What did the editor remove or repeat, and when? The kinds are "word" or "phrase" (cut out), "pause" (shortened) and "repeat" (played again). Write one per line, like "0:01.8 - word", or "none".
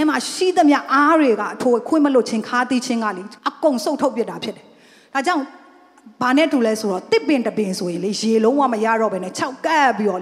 0:03.4 - pause